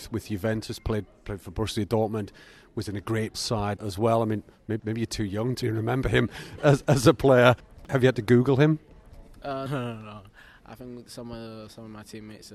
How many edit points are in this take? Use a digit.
6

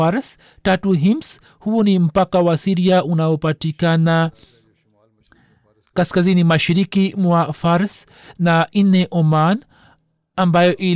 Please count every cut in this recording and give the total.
0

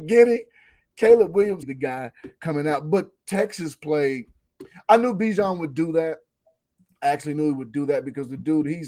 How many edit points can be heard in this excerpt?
1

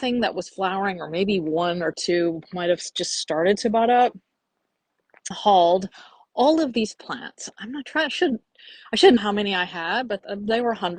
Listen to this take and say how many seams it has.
2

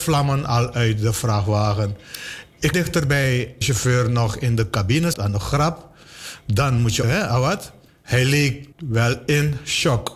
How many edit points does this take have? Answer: 6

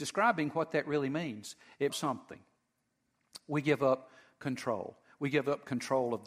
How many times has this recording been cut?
1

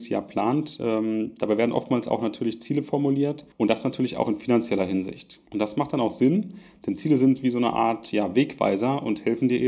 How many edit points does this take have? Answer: 2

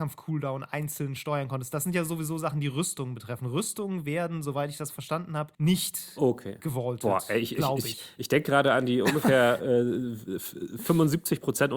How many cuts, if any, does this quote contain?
1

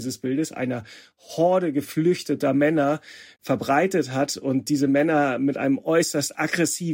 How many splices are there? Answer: 0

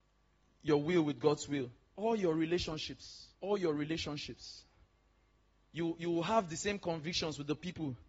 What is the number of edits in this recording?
2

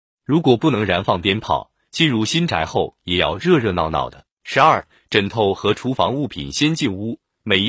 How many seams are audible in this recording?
1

